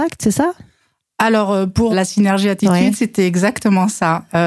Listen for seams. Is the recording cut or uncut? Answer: cut